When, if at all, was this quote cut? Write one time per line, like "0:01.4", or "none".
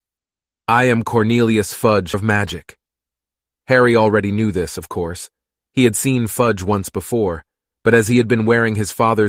0:02.1